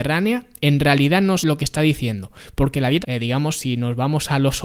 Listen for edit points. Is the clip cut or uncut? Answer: cut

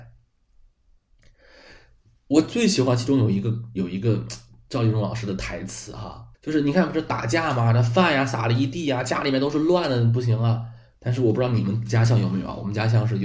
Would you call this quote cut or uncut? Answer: cut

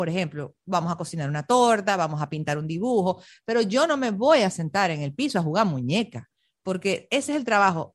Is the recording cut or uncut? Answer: uncut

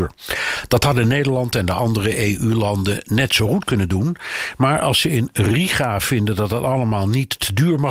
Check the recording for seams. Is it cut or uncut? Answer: uncut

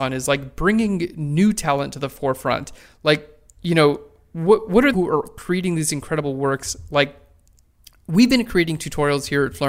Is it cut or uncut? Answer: cut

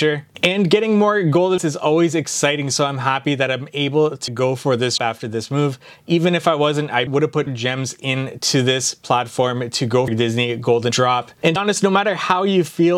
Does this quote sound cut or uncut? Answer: cut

